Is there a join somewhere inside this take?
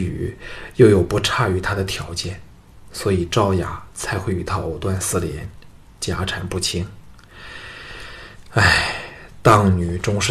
no; 0 cuts

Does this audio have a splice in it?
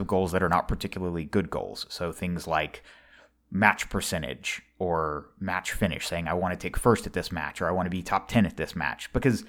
no; 0 cuts

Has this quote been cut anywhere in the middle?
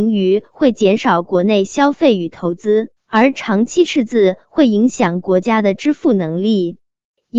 yes; 1 cut; at 3.0 s

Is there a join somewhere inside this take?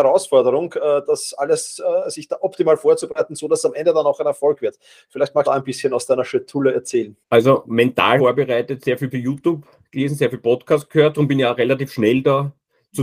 yes; 4 cuts; at 5.4 s, 7.2 s, 8.2 s, 9.1 s

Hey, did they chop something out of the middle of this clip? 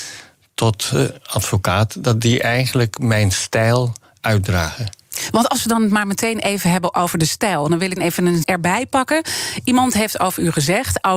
yes; 2 cuts; at 8.0 s, 8.4 s

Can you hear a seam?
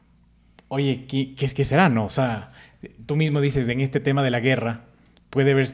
no; 0 cuts

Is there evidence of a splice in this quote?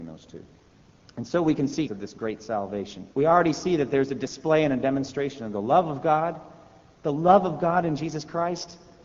yes; 2 cuts; at 1.9 s, 3.1 s

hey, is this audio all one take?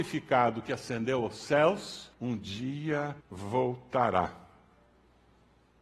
no; 2 cuts; at 2.1 s, 3.2 s

